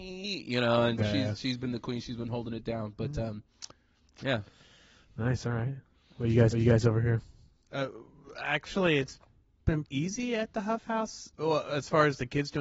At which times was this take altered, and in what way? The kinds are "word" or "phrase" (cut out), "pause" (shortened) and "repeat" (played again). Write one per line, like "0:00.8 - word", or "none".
0:01.0 - word
0:06.5 - repeat
0:09.8 - word